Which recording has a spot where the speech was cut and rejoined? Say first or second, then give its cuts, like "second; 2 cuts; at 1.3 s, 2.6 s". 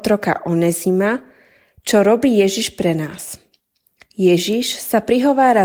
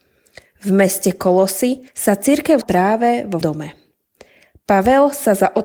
second; 3 cuts; at 1.9 s, 2.6 s, 3.4 s